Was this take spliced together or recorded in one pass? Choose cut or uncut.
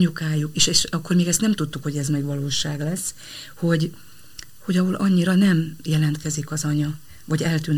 uncut